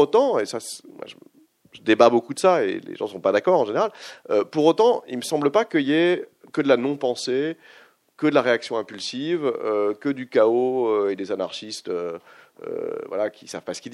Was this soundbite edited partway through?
yes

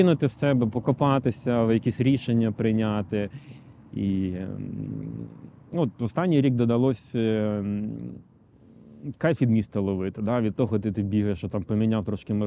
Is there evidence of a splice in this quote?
no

